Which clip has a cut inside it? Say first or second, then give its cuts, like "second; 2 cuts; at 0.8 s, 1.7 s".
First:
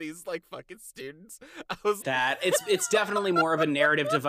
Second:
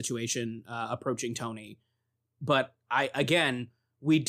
first; 1 cut; at 2.0 s